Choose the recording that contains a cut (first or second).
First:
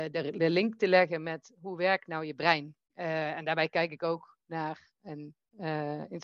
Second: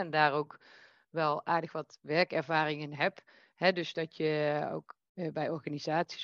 first